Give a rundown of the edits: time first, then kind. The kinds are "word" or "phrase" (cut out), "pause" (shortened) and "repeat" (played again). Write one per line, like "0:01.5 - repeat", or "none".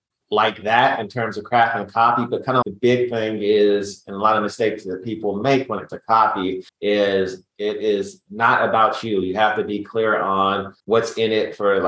0:02.6 - word
0:05.9 - word
0:06.7 - pause
0:10.8 - pause